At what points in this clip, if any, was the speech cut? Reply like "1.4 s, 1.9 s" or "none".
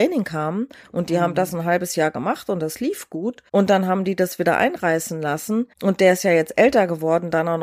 3.5 s, 5.7 s